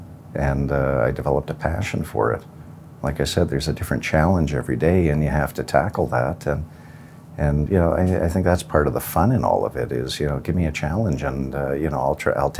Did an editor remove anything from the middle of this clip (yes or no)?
yes